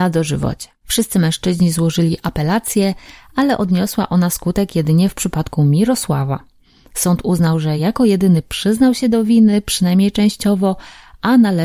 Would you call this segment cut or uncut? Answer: uncut